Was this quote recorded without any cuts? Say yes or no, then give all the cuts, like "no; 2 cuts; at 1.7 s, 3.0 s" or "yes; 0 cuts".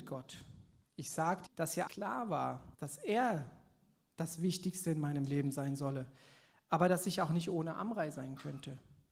no; 3 cuts; at 1.5 s, 1.9 s, 2.7 s